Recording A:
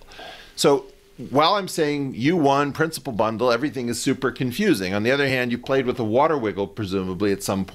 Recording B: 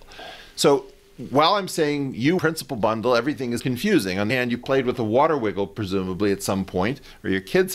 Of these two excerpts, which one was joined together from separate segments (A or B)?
B